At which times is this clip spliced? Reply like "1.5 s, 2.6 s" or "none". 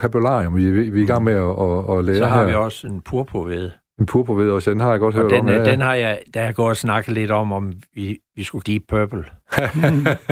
8.6 s

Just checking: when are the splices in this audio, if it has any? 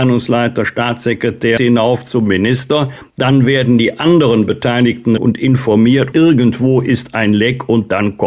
1.6 s, 5.2 s, 6.1 s

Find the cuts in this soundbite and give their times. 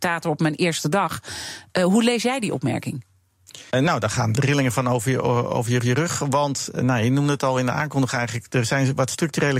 3.7 s, 4.3 s, 5.8 s

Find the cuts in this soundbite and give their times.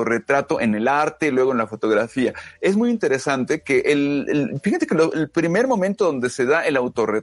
none

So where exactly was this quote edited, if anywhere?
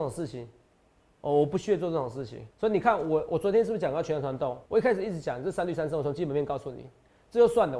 2.5 s, 4.6 s

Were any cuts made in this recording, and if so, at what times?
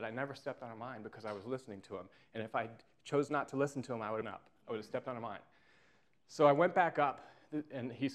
4.2 s

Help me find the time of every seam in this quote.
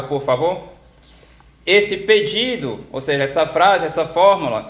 none

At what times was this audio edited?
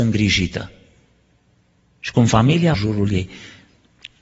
2.7 s

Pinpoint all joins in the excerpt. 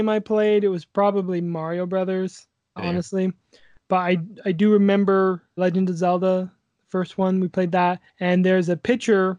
2.8 s, 5.6 s, 8.1 s

